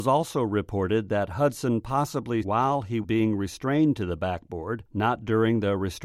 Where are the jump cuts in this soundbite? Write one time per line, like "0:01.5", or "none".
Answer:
0:02.4
0:03.0